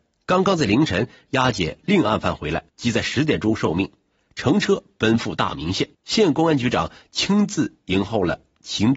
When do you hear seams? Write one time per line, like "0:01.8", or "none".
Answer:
0:02.7
0:05.9